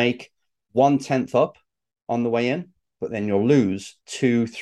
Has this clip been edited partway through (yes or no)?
no